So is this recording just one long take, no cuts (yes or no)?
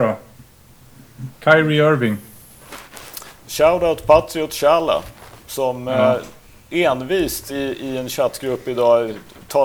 yes